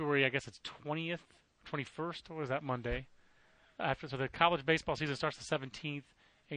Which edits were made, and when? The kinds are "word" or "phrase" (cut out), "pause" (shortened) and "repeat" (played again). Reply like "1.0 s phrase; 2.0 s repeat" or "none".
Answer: none